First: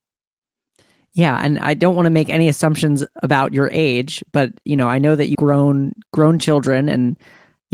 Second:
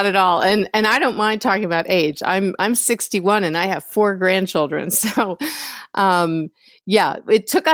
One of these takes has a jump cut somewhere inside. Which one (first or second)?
first